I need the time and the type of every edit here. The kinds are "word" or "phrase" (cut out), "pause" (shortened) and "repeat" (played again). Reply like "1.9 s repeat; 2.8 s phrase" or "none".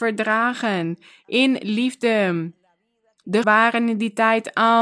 3.4 s word